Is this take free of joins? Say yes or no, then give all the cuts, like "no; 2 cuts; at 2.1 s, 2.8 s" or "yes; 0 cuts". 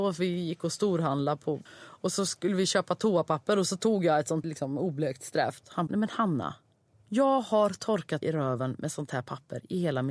no; 4 cuts; at 1.7 s, 4.4 s, 5.9 s, 8.2 s